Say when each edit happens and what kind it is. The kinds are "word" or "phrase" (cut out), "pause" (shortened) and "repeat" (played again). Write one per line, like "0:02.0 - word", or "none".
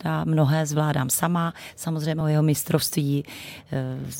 none